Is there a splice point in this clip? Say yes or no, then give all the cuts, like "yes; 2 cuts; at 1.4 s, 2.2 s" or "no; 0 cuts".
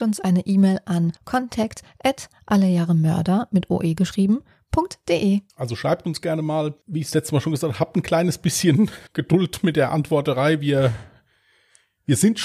yes; 4 cuts; at 1.2 s, 5.5 s, 6.8 s, 9.1 s